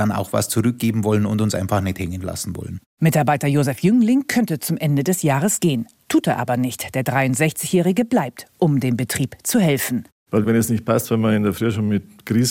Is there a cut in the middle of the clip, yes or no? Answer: no